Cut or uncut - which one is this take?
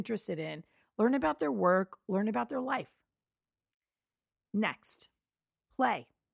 uncut